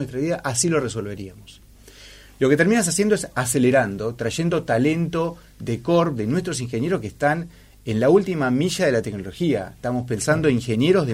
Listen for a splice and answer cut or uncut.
uncut